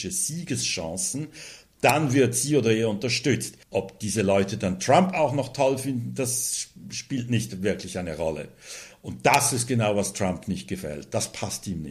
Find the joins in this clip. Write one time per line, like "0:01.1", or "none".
0:03.6